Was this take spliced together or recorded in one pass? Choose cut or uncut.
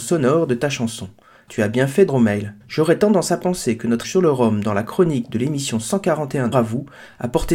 cut